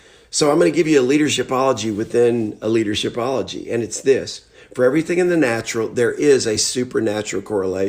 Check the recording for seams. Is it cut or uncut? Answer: uncut